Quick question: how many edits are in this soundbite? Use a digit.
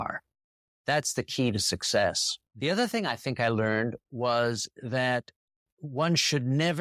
1